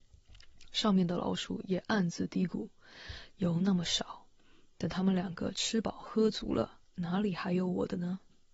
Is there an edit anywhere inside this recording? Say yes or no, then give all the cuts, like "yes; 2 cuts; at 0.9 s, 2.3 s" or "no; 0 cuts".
no; 0 cuts